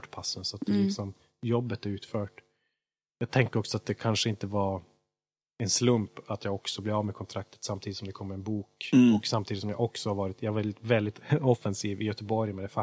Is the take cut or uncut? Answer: uncut